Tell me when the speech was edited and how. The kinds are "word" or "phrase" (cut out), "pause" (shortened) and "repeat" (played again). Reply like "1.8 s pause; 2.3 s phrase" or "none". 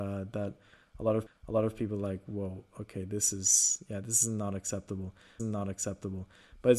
1.3 s repeat; 5.4 s repeat